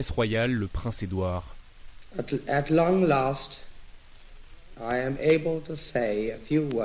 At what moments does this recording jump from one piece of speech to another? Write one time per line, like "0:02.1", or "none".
none